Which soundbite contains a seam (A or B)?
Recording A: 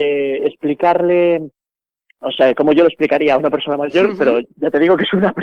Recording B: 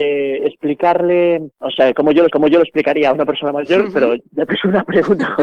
B